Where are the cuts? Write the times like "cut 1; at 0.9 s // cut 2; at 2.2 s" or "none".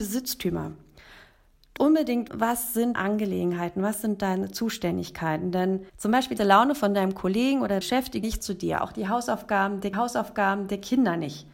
cut 1; at 1.8 s // cut 2; at 2.3 s // cut 3; at 3.0 s // cut 4; at 5.9 s // cut 5; at 6.4 s // cut 6; at 7.8 s // cut 7; at 8.2 s // cut 8; at 9.9 s